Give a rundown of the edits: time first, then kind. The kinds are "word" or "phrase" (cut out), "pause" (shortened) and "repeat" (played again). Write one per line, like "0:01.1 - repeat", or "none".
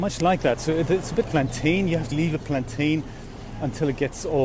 0:01.2 - word
0:02.1 - word